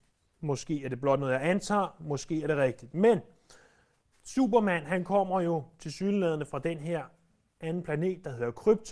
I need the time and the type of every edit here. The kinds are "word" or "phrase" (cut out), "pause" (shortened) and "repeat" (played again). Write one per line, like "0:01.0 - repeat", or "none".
none